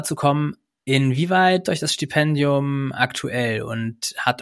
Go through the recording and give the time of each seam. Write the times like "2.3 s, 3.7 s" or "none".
1.6 s